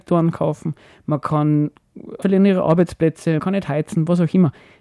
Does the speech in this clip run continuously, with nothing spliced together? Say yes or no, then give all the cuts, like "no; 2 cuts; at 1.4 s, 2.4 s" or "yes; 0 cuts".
no; 2 cuts; at 2.2 s, 3.4 s